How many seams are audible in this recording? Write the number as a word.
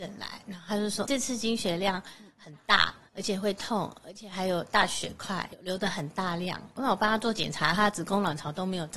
two